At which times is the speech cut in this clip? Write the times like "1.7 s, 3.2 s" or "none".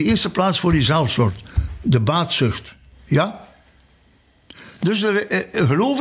none